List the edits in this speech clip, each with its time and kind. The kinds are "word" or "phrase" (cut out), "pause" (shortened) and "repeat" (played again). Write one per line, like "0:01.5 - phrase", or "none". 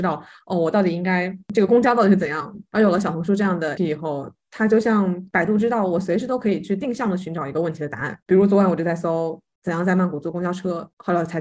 0:03.8 - word